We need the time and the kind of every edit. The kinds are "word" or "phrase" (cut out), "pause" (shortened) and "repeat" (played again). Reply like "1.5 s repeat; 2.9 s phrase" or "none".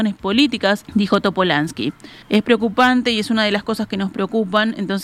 2.2 s pause